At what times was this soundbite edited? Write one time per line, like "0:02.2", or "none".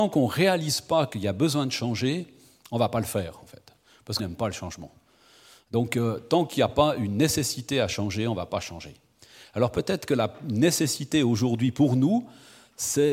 0:04.2